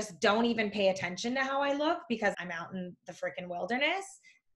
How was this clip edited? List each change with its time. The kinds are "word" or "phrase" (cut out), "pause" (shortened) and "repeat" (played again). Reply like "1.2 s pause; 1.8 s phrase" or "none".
2.3 s word